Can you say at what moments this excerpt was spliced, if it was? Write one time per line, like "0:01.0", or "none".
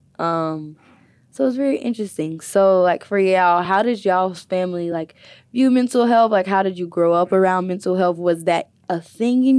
none